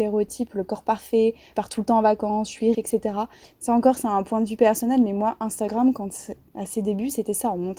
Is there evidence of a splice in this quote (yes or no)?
yes